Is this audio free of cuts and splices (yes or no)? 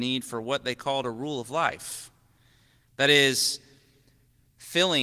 yes